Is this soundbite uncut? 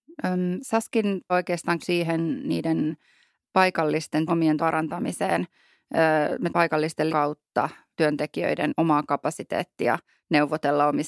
no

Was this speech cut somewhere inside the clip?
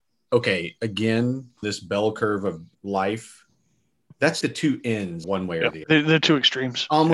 yes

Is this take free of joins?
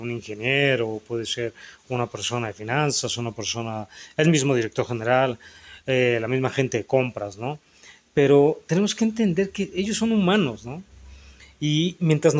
yes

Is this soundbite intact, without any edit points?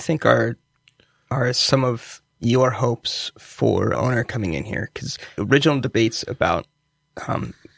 no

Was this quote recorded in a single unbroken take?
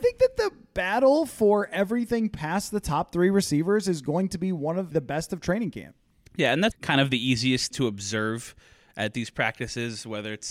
no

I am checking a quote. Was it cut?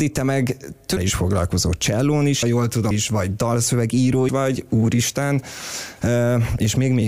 yes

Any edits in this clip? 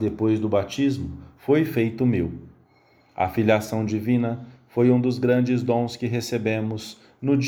no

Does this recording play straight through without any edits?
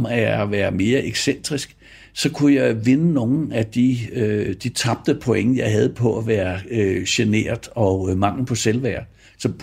yes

